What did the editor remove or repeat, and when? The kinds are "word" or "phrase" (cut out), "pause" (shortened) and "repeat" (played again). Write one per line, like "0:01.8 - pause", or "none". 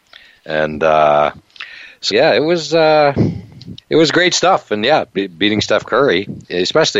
0:02.1 - word
0:03.8 - pause

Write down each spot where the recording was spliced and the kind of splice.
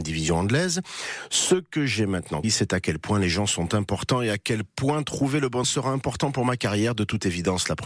0:02.4 - word
0:05.6 - word

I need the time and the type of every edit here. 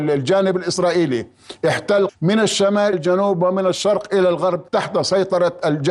0:02.1 - phrase
0:02.9 - word
0:04.7 - pause

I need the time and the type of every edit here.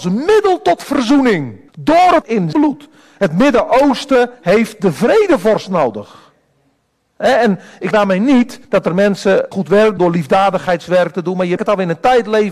0:01.7 - pause
0:02.2 - word
0:02.5 - word
0:04.3 - pause
0:07.9 - word
0:08.6 - pause
0:09.5 - word
0:10.0 - word
0:11.6 - word

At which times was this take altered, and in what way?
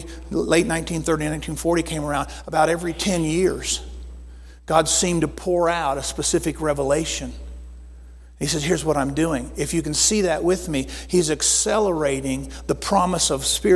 none

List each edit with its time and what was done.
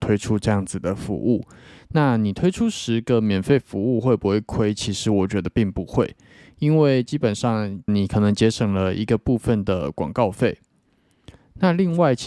0:07.9 - word

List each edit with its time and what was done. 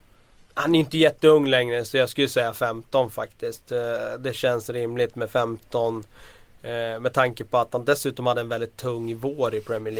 none

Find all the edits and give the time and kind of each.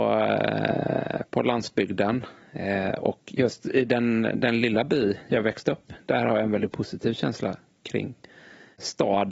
none

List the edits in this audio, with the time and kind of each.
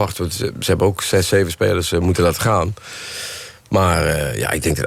none

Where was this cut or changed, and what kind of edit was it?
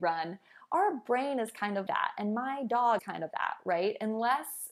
0:01.9 - word
0:03.0 - word
0:03.3 - word

